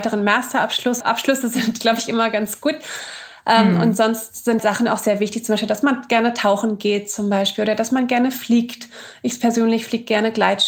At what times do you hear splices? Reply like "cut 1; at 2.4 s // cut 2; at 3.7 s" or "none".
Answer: cut 1; at 1.0 s // cut 2; at 4.6 s